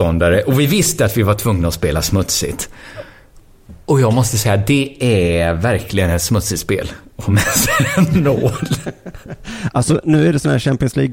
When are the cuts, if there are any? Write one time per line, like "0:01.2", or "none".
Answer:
none